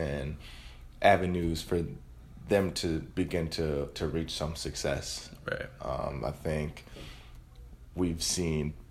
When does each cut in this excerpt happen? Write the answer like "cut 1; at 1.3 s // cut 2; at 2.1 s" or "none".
none